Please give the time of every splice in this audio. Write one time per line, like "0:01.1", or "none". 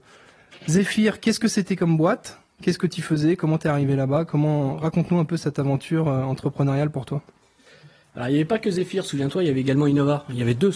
none